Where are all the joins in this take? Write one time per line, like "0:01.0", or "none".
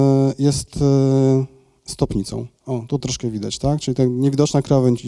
0:02.6
0:03.0

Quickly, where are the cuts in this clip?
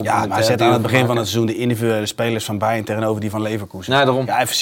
none

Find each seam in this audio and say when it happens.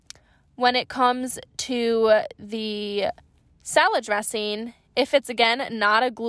none

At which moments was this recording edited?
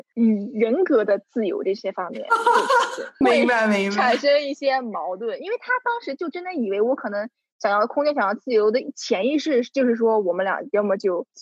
none

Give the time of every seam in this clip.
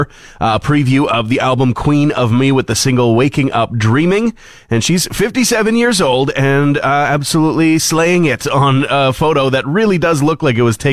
none

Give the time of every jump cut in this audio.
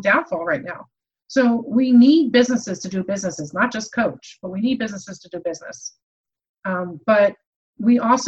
none

